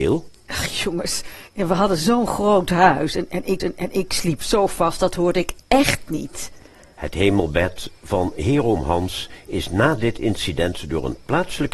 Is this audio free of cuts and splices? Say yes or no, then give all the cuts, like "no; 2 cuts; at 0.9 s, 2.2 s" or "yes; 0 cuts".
no; 2 cuts; at 1.5 s, 3.6 s